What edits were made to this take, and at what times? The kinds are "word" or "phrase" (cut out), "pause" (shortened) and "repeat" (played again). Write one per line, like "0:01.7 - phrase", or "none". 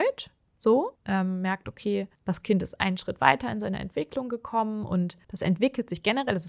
0:01.0 - pause
0:02.1 - pause
0:05.2 - pause